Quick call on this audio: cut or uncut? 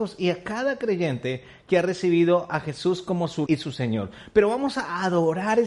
cut